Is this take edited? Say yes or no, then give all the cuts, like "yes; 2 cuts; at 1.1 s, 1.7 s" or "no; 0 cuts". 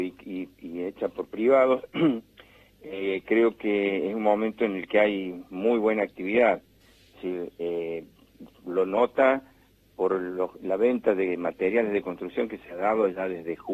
no; 0 cuts